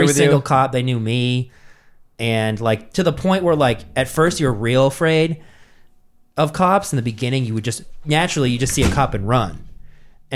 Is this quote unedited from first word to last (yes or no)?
yes